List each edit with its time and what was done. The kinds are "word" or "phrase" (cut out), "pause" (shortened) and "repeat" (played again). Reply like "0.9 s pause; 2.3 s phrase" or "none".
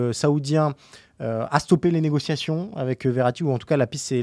none